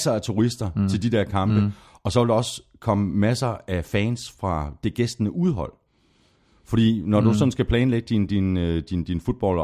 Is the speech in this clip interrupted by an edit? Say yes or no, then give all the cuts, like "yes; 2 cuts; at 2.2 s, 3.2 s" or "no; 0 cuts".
no; 0 cuts